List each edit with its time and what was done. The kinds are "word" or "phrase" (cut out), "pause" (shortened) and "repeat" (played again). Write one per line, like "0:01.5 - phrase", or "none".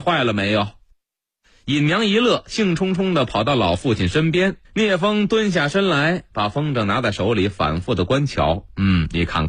0:04.6 - pause